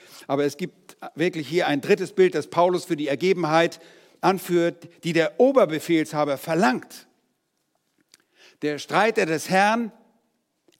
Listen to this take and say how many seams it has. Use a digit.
0